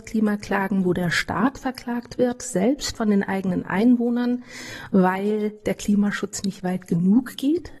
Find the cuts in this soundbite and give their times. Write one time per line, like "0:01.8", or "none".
none

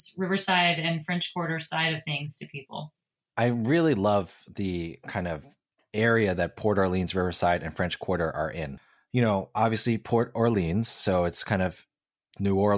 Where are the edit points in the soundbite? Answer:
none

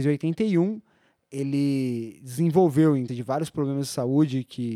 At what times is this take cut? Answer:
0:03.1

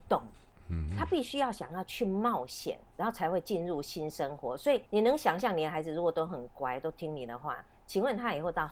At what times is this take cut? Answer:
0:02.9
0:04.9

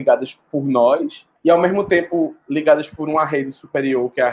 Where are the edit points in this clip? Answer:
0:01.4

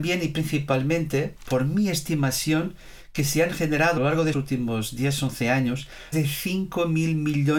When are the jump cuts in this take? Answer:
0:04.0
0:04.3
0:06.1

